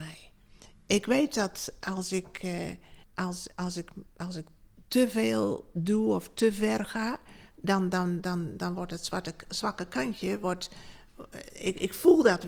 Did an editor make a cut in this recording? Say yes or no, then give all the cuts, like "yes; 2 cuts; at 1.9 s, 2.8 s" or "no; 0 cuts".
yes; 1 cut; at 3.0 s